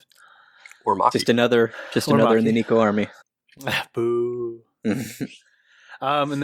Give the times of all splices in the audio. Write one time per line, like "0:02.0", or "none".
0:03.2

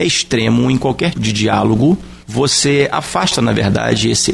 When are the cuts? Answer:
0:01.1
0:02.2

